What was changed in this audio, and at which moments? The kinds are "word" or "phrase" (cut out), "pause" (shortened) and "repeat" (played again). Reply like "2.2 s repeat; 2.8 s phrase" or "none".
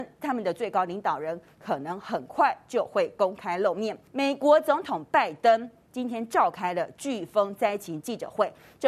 4.1 s pause